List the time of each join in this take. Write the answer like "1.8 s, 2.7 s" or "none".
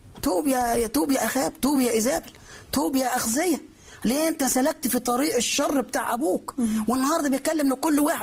none